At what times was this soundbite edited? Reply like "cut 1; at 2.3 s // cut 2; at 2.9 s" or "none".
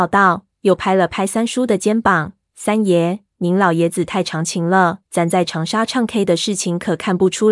cut 1; at 5.0 s